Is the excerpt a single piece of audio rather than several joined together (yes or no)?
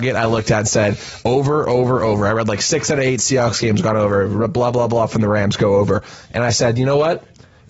no